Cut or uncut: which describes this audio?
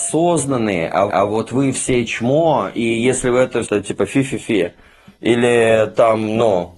cut